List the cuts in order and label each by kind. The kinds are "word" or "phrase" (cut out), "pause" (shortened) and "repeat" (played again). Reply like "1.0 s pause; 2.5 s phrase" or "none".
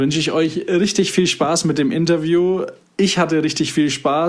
none